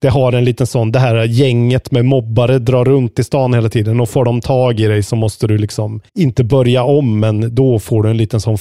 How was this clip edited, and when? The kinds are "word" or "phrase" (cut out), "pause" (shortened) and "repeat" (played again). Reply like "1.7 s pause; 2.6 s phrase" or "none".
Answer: 6.1 s pause